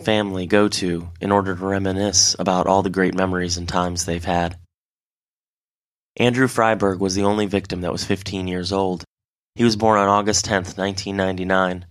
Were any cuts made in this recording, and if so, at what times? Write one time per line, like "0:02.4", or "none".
none